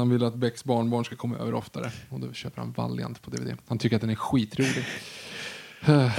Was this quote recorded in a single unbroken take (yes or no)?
yes